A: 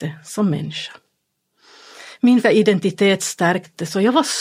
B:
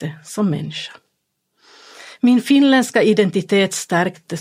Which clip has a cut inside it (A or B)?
A